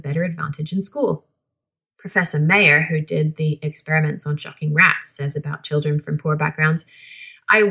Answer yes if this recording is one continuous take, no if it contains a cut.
yes